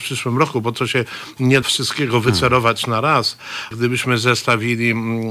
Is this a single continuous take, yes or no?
no